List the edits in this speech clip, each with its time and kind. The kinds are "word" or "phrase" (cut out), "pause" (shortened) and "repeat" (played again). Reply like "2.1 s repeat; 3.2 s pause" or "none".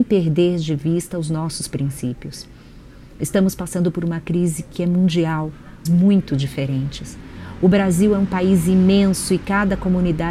5.9 s phrase